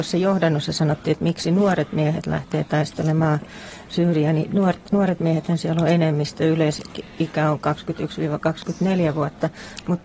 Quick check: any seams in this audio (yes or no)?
no